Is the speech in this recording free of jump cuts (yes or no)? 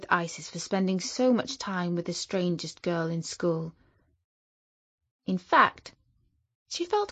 yes